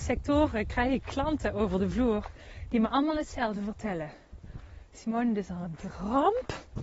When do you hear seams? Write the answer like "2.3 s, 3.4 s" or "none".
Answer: none